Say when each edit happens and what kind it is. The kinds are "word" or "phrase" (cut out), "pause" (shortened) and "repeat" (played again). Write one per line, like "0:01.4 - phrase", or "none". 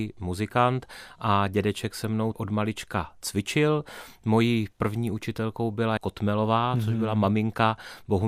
0:02.3 - word
0:06.0 - word